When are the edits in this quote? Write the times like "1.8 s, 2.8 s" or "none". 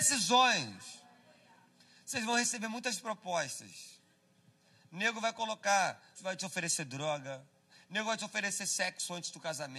6.1 s